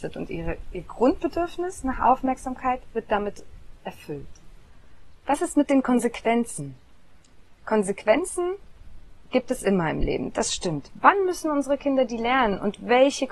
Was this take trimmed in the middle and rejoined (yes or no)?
no